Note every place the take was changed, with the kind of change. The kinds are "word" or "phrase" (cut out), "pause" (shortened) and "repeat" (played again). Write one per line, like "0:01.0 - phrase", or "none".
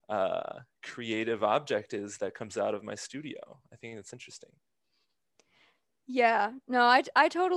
none